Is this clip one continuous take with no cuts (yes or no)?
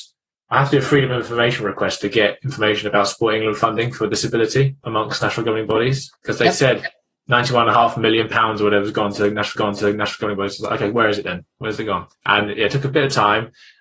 no